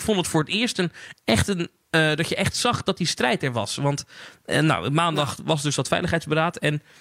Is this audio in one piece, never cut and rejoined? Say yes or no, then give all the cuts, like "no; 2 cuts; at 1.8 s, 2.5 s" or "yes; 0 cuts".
yes; 0 cuts